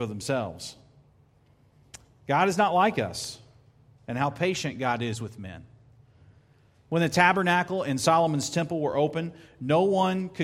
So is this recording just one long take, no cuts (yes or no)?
yes